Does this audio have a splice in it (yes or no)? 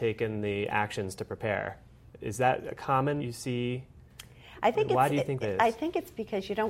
yes